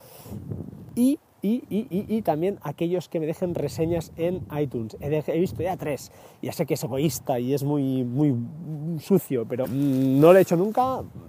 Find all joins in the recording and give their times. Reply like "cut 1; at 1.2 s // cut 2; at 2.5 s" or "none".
cut 1; at 9.6 s